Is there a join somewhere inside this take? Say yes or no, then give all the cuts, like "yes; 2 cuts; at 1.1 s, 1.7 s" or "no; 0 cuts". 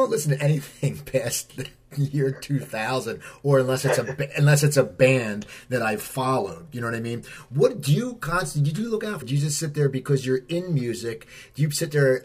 yes; 1 cut; at 9.2 s